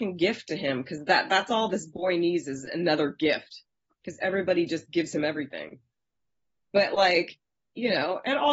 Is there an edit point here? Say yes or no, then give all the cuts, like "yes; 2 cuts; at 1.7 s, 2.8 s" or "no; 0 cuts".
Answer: no; 0 cuts